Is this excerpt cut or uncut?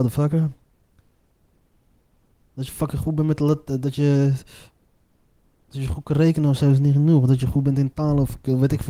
uncut